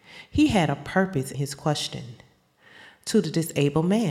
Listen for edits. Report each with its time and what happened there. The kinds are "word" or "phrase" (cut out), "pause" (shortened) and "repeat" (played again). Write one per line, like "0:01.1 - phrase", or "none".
0:01.3 - word